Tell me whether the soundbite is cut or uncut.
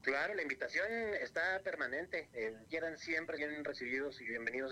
cut